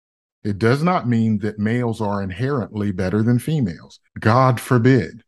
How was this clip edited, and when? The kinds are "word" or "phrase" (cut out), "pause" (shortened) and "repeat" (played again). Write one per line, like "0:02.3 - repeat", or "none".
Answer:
0:04.1 - pause

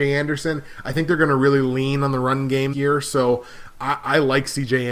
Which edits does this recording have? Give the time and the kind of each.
0:02.7 - word

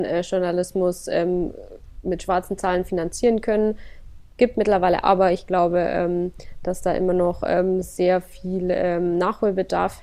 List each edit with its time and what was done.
0:05.0 - phrase

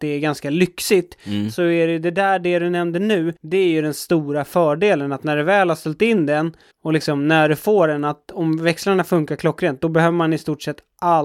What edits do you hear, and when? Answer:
0:03.4 - pause
0:06.7 - pause

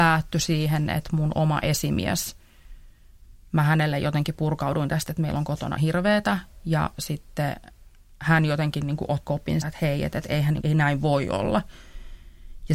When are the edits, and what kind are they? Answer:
0:05.8 - word
0:09.3 - word
0:09.6 - word
0:10.6 - word

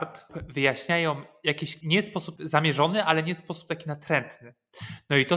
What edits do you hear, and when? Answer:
0:01.8 - word
0:02.4 - word

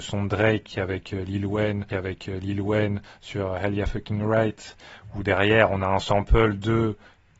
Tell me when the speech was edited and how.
0:01.9 - repeat

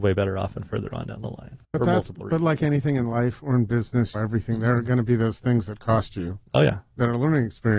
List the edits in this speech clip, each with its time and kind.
0:01.6 - pause
0:04.1 - phrase

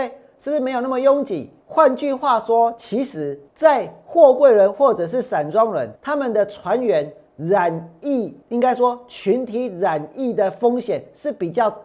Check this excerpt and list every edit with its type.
0:01.6 - pause
0:03.5 - pause
0:06.0 - pause
0:08.4 - pause

